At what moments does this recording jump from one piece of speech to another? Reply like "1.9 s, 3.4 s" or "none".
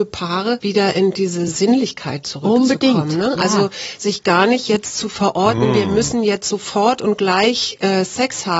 none